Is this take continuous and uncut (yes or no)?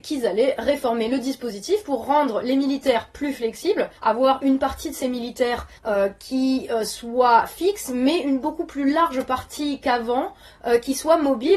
no